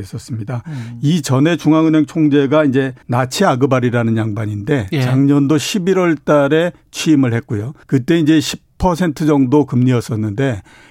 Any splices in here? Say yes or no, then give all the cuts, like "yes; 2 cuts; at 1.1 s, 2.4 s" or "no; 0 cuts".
yes; 2 cuts; at 3.0 s, 7.8 s